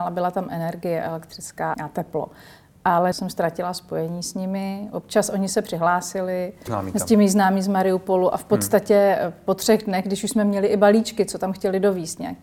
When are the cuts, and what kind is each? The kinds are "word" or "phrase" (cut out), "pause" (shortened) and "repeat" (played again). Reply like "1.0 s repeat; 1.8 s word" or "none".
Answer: 1.7 s word; 3.1 s phrase; 6.7 s word